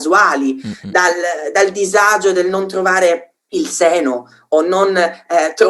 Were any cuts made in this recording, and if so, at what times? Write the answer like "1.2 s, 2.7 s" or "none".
3.4 s